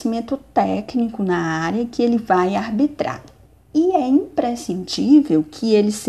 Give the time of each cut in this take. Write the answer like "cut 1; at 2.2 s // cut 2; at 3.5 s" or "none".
cut 1; at 3.5 s